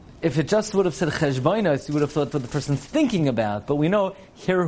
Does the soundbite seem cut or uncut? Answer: cut